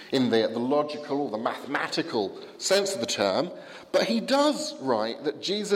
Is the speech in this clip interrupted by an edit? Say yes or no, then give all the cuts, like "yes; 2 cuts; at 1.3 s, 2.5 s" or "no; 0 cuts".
no; 0 cuts